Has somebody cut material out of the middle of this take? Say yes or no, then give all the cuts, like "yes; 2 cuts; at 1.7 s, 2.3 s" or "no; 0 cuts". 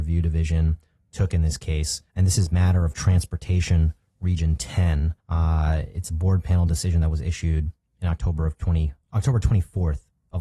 yes; 2 cuts; at 2.1 s, 5.2 s